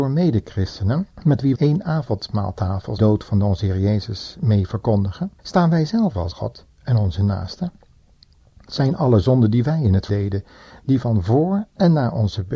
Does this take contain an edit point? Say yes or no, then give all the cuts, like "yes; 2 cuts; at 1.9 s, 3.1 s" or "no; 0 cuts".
yes; 6 cuts; at 1.1 s, 1.6 s, 3.0 s, 5.4 s, 6.3 s, 10.1 s